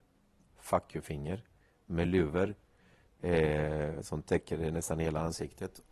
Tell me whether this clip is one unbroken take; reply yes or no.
yes